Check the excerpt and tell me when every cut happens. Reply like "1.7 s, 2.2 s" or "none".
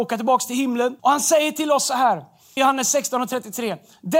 1.0 s, 2.6 s